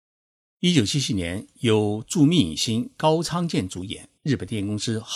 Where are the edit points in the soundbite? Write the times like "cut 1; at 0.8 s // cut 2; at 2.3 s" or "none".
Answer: cut 1; at 4.2 s